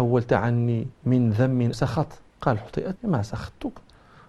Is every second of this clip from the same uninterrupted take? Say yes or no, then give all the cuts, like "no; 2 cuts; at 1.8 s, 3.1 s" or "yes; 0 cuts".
no; 4 cuts; at 0.9 s, 1.7 s, 2.3 s, 3.0 s